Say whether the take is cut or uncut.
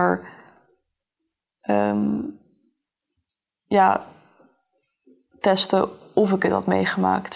uncut